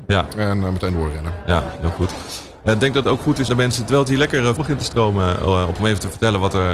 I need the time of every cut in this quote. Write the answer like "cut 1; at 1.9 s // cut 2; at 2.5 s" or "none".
cut 1; at 3.0 s // cut 2; at 3.5 s // cut 3; at 4.6 s // cut 4; at 5.8 s